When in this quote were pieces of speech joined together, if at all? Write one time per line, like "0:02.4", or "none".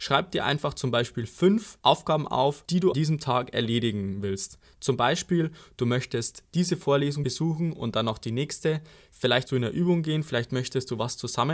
0:02.9
0:09.5